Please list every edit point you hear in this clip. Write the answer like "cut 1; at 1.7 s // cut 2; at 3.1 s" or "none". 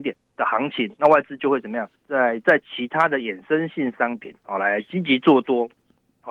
cut 1; at 2.0 s